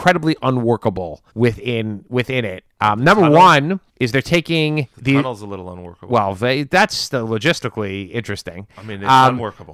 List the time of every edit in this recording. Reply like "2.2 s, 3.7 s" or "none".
1.3 s, 3.9 s, 4.9 s